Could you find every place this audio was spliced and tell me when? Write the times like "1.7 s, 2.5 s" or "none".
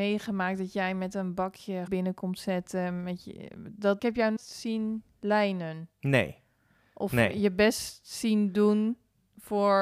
1.9 s, 4.0 s, 4.4 s